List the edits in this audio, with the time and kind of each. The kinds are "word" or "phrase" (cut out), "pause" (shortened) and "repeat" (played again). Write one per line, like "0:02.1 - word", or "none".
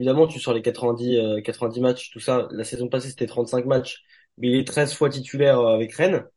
none